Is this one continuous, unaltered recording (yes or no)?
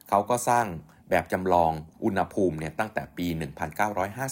no